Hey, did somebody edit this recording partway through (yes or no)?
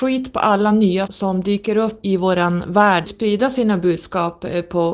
yes